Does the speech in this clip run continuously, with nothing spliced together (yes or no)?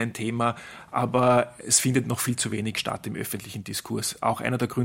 yes